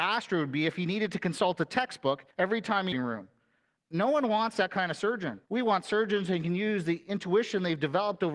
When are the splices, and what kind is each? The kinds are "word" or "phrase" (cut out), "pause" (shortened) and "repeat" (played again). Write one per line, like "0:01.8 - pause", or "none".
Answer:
0:02.3 - pause
0:02.9 - phrase
0:05.4 - pause